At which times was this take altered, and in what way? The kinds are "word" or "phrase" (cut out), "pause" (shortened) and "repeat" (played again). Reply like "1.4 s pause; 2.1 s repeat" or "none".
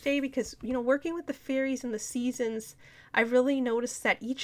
none